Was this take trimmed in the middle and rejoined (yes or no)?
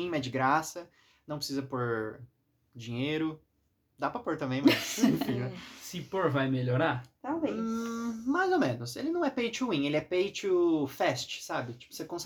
no